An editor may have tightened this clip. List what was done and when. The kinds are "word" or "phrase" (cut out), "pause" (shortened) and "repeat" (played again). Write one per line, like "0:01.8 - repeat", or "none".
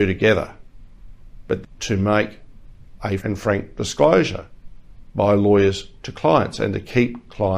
0:01.6 - phrase
0:03.2 - word

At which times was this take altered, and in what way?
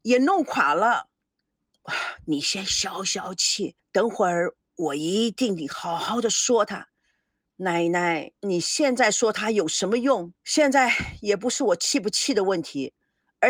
0:03.8 - pause
0:08.4 - pause
0:10.4 - pause

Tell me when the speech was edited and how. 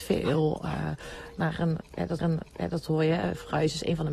0:02.2 - repeat

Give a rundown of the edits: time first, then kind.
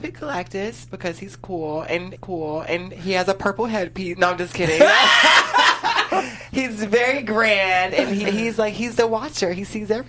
0:02.2 - repeat
0:08.2 - word

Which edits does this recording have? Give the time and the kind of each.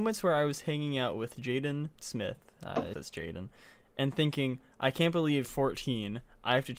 0:02.0 - pause
0:02.9 - word
0:05.4 - word

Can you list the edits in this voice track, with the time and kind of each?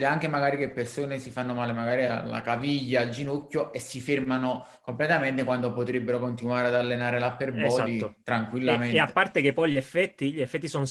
none

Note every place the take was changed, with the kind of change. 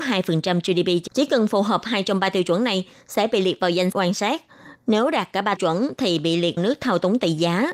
0:01.1 - word
0:03.9 - word
0:05.6 - word
0:06.6 - word

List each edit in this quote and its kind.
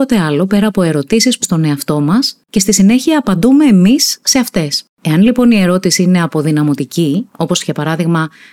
0:01.4 - word
0:04.9 - pause

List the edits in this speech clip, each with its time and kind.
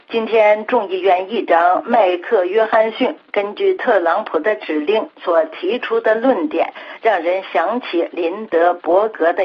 none

